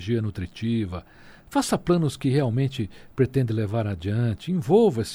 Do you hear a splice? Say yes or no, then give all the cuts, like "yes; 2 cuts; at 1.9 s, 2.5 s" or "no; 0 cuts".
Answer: no; 0 cuts